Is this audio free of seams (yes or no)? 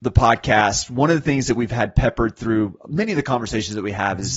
yes